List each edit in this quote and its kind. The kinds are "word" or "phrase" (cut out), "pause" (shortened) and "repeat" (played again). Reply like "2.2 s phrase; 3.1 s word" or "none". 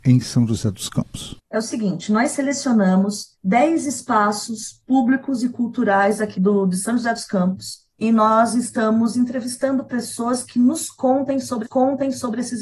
1.4 s pause; 3.3 s pause; 6.3 s word; 7.9 s pause; 11.6 s repeat